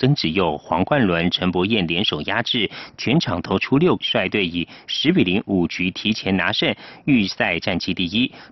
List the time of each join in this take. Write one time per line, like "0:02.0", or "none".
0:04.0